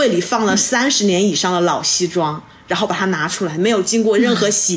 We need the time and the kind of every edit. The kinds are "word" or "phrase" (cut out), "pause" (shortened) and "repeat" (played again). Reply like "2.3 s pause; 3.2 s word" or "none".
none